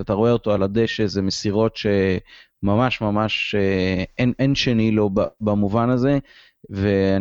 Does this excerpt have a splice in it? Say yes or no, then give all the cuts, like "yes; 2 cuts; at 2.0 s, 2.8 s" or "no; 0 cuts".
no; 0 cuts